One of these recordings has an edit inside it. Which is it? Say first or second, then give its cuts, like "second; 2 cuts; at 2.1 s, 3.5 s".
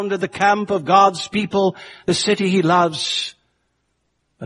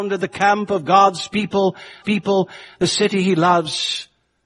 second; 1 cut; at 2.0 s